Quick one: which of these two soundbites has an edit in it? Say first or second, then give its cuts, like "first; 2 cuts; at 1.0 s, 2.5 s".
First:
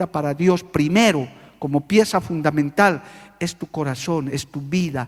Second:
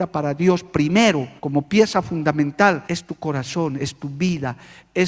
second; 2 cuts; at 1.4 s, 2.8 s